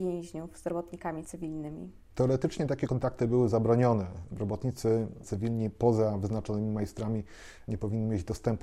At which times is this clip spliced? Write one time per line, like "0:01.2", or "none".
none

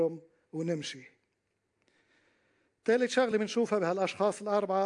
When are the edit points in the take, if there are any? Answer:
none

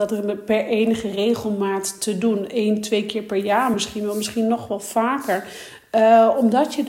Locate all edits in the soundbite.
none

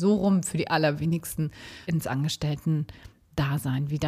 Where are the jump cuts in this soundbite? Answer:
0:01.8

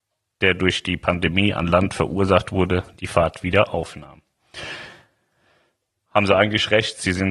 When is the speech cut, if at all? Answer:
none

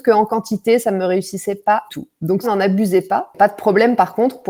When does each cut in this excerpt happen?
0:01.9
0:02.4

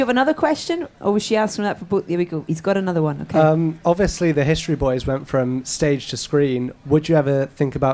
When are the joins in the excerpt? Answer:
none

